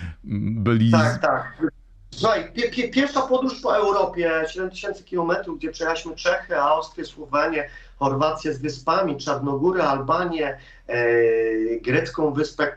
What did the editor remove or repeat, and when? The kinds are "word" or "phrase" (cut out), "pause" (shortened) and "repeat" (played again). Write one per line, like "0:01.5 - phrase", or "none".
none